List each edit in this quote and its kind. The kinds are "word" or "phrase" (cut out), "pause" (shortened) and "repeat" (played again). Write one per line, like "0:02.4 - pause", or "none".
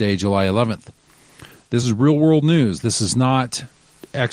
none